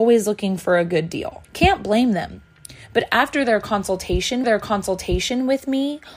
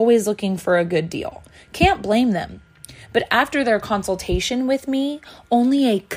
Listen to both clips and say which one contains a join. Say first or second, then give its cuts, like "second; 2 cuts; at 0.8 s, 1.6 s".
first; 2 cuts; at 1.4 s, 4.4 s